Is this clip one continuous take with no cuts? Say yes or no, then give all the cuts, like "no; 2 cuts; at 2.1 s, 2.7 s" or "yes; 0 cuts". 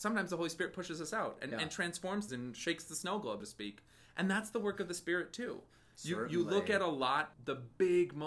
no; 3 cuts; at 2.3 s, 3.4 s, 7.3 s